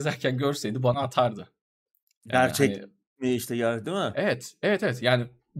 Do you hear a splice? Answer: no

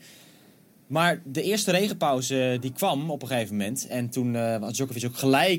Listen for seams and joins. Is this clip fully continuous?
yes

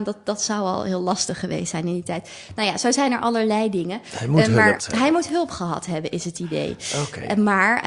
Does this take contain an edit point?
yes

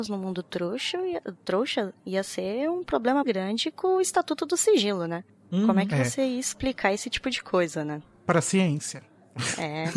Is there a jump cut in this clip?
yes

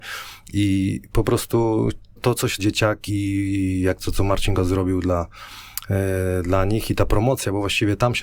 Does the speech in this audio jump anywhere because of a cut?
yes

